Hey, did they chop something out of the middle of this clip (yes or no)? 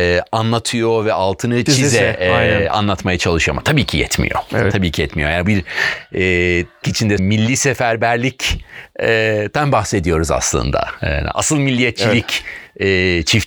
yes